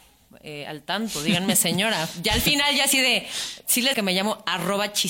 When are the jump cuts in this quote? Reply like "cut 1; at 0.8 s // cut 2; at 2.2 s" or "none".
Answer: cut 1; at 3.9 s